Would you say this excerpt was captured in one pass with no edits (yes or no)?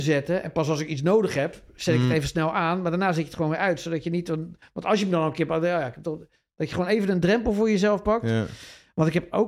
yes